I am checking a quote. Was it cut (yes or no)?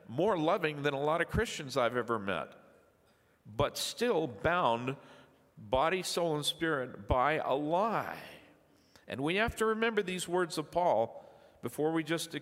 no